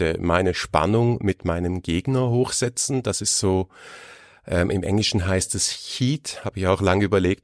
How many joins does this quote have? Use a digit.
0